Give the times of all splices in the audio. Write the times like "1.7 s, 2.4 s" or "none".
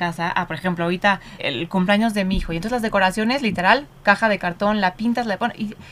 1.4 s

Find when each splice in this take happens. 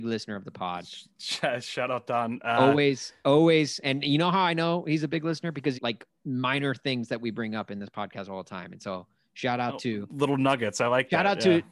5.7 s

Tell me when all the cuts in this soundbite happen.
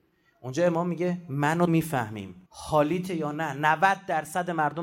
1.7 s, 2.5 s

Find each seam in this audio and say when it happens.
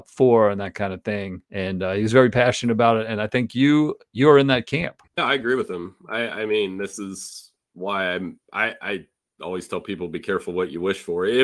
1.5 s, 5.1 s, 8.4 s

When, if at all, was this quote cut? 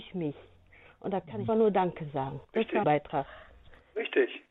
1.5 s, 2.4 s, 2.8 s

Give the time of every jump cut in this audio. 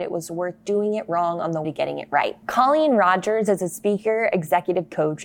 1.6 s, 2.4 s

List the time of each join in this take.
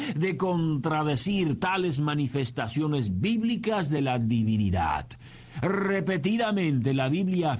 none

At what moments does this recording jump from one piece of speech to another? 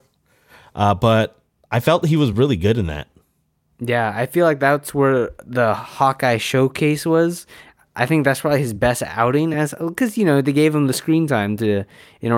none

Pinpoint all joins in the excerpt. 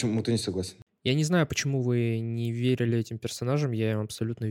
none

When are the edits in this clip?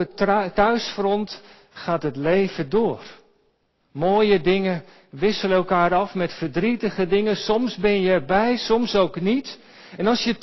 none

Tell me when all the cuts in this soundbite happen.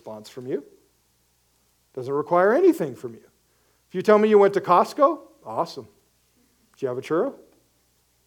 none

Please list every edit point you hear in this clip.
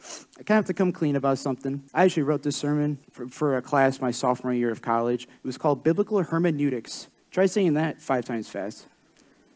1.9 s, 3.0 s

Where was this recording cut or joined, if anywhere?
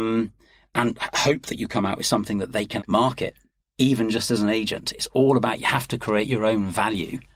2.8 s

